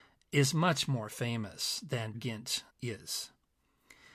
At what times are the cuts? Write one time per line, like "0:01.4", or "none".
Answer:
0:02.1
0:02.7